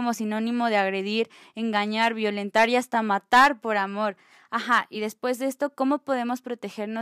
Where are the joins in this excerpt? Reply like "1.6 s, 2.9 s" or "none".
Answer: none